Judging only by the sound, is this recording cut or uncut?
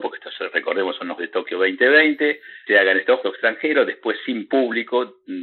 cut